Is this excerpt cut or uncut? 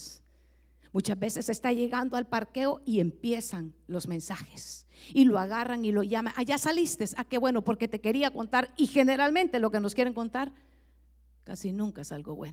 uncut